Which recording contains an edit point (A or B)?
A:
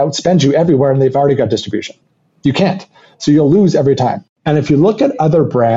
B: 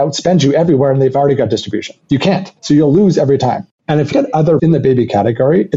B